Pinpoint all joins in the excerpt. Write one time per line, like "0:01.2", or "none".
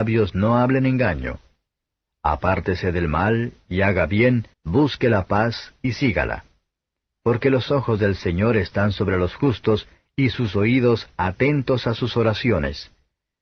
0:04.5